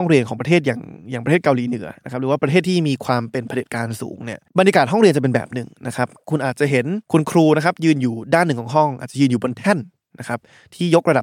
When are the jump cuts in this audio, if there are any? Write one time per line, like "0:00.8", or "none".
0:04.5
0:07.0